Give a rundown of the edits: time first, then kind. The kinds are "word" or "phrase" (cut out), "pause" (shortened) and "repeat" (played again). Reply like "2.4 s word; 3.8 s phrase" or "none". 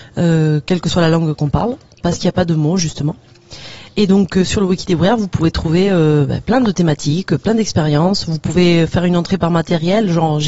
none